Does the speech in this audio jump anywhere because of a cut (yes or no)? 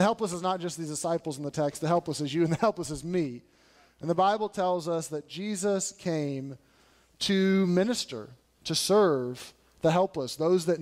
no